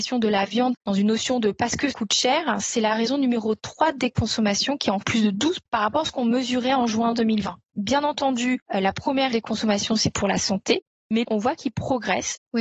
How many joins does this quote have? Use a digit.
5